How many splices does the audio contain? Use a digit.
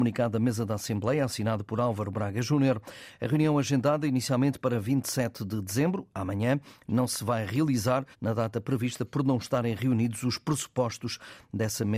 1